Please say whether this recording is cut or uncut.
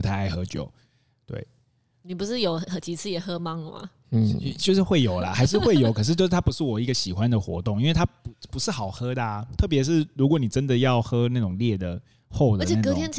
uncut